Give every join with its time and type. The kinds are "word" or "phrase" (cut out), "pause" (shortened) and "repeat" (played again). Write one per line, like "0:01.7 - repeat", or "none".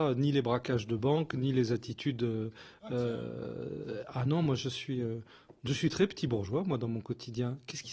none

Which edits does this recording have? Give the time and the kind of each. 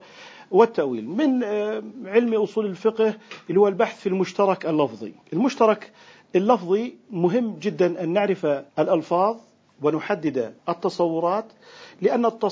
0:05.2 - pause
0:08.7 - pause
0:10.6 - pause

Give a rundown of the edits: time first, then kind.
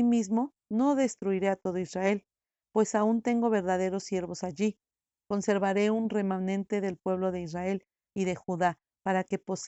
none

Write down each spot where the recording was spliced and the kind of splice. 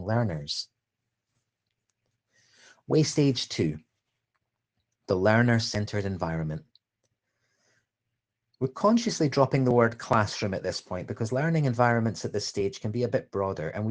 none

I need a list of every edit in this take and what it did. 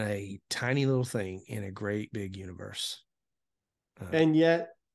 none

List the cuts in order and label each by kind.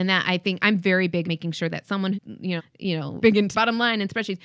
0:01.2 - word
0:02.1 - word
0:02.6 - word
0:03.2 - word
0:03.5 - word

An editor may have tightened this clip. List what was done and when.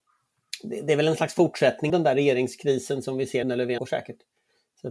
0:01.9 - word
0:03.4 - word
0:03.8 - word

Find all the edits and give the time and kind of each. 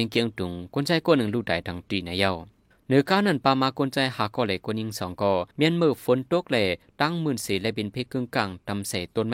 0:05.5 - pause

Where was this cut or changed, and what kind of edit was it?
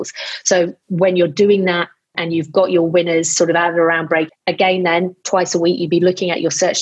0:02.1 - word
0:04.3 - word

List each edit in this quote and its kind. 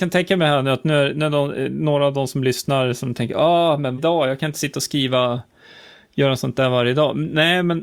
0:04.0 - word

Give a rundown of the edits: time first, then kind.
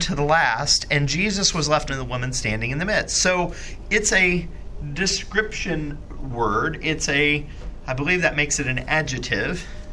0:01.9 - word

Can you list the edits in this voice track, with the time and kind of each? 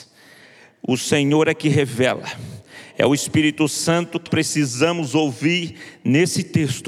0:04.3 - phrase

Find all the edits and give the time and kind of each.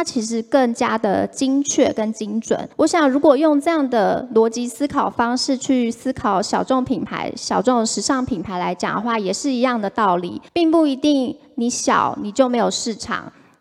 0:02.7 - pause
0:10.5 - pause

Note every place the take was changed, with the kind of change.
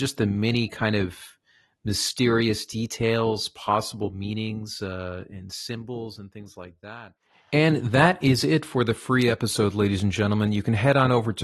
none

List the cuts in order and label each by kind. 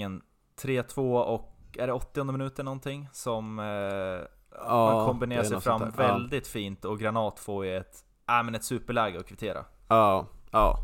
none

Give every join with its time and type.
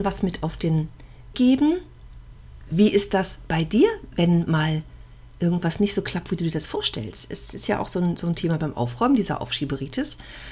0:01.3 - word

